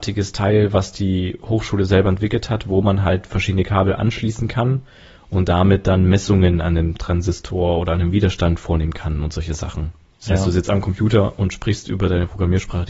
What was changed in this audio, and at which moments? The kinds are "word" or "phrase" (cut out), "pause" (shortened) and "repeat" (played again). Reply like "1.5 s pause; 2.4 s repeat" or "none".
none

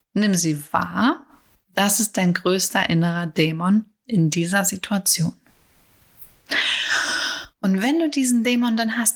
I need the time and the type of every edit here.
none

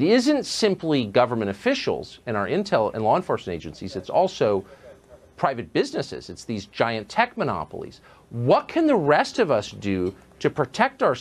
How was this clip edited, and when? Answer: none

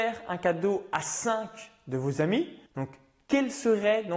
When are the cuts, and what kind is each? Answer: 2.7 s pause

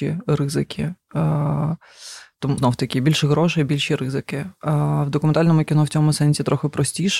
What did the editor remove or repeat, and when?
2.6 s word

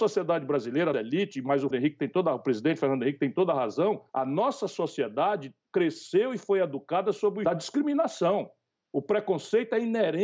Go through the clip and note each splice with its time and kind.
0.9 s word; 1.7 s word; 4.1 s pause; 5.6 s pause; 7.4 s phrase

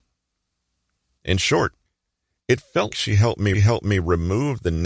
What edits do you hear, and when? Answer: 2.9 s word; 3.5 s repeat

